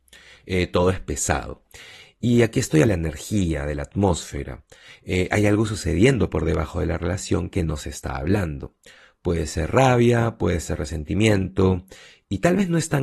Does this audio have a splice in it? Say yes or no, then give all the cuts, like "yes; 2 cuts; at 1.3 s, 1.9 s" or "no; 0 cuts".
yes; 1 cut; at 2.8 s